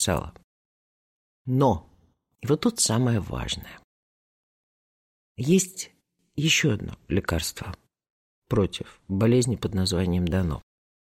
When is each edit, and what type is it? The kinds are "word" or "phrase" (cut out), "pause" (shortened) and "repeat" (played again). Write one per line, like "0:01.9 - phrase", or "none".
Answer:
none